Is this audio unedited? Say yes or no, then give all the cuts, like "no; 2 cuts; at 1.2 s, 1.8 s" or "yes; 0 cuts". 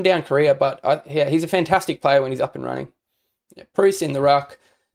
yes; 0 cuts